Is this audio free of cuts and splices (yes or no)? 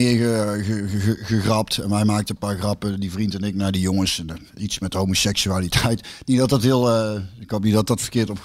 no